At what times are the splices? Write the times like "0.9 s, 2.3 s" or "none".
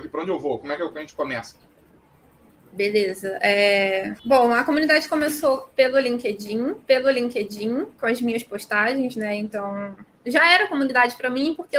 4.2 s, 6.9 s